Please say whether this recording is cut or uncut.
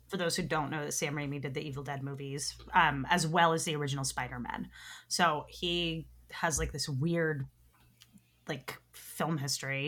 uncut